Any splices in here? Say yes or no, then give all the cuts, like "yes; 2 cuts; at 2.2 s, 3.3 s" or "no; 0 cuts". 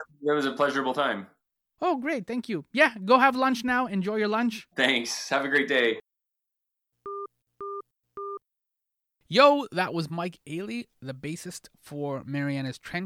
yes; 2 cuts; at 4.7 s, 11.7 s